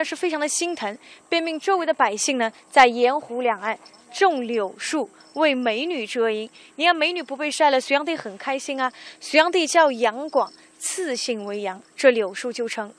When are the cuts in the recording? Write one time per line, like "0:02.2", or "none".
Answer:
none